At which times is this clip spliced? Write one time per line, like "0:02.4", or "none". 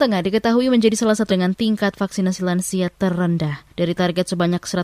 0:01.3
0:03.7